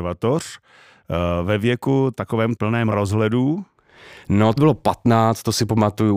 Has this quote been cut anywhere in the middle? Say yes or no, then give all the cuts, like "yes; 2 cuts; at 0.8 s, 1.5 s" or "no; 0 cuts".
yes; 3 cuts; at 2.6 s, 2.9 s, 4.6 s